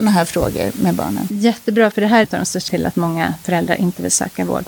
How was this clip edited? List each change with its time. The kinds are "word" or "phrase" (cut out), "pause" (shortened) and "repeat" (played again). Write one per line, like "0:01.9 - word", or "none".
0:01.9 - word
0:02.2 - phrase
0:02.7 - word